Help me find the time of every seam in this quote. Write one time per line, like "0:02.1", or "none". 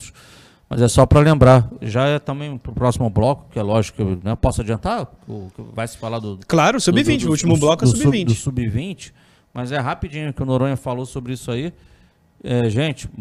none